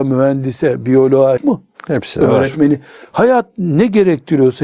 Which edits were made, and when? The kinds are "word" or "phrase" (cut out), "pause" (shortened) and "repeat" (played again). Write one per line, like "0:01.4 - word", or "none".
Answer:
0:01.4 - phrase